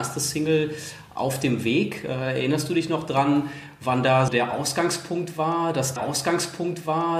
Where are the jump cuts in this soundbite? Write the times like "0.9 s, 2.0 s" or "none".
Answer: 4.3 s, 6.0 s